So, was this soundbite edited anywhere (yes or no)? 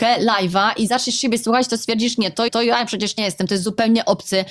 yes